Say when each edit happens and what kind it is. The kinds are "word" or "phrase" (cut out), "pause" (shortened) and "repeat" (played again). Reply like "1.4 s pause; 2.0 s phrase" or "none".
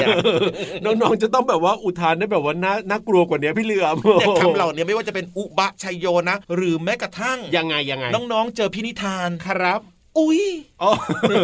6.4 s pause